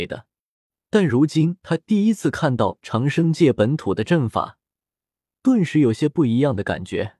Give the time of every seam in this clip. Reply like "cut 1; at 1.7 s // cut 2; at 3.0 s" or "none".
none

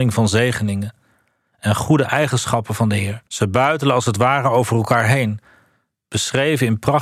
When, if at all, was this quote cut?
cut 1; at 3.3 s

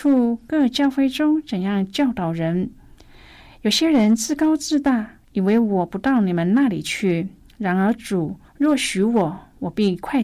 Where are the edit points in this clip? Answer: cut 1; at 8.5 s

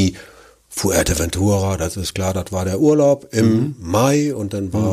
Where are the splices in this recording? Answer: none

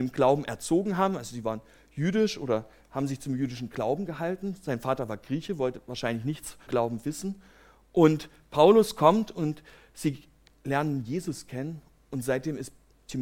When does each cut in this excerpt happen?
cut 1; at 6.7 s

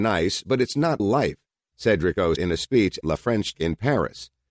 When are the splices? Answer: cut 1; at 1.0 s // cut 2; at 2.4 s // cut 3; at 3.0 s // cut 4; at 3.5 s

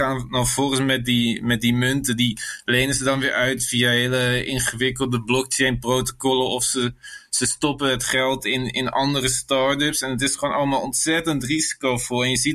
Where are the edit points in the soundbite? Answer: none

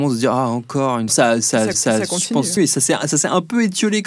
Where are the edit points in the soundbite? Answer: cut 1; at 1.1 s // cut 2; at 1.7 s // cut 3; at 2.6 s

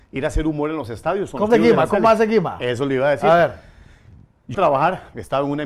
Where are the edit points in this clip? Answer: cut 1; at 1.5 s // cut 2; at 4.5 s

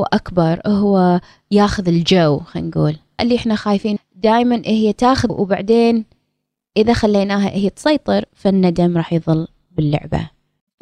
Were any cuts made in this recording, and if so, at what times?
cut 1; at 3.2 s // cut 2; at 4.0 s // cut 3; at 5.3 s

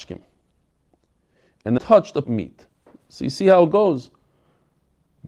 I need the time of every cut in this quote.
cut 1; at 1.8 s // cut 2; at 2.2 s

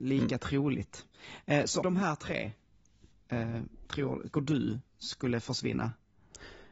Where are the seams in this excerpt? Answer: cut 1; at 1.8 s // cut 2; at 3.9 s // cut 3; at 4.3 s

